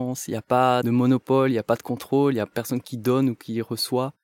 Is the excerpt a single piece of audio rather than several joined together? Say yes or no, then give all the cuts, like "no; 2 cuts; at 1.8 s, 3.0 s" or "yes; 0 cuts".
yes; 0 cuts